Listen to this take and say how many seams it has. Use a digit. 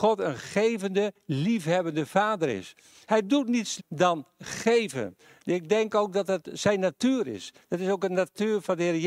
1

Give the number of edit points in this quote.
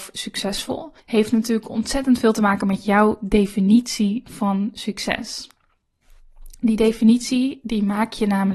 1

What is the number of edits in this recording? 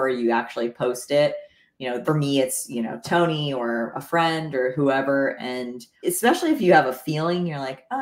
2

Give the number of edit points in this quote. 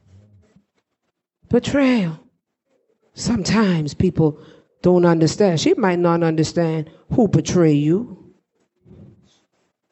0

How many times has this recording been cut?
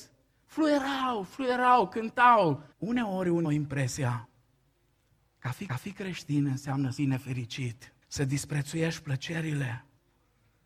5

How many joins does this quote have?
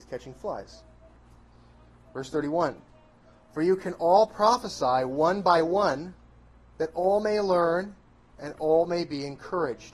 0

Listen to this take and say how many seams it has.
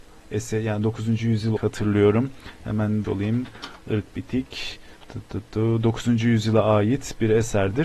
2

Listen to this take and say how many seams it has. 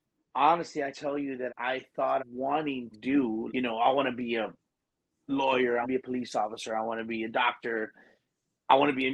7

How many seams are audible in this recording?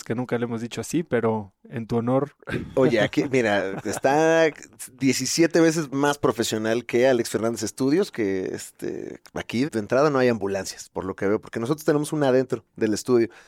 1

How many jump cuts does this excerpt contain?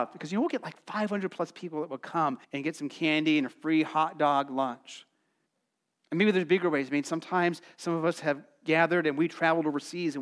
2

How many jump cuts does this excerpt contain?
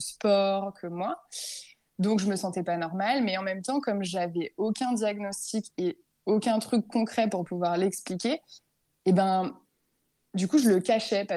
0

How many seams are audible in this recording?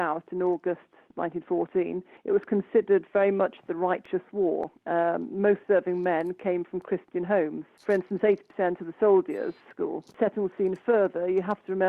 2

